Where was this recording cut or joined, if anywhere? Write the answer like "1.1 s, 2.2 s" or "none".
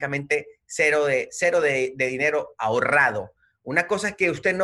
none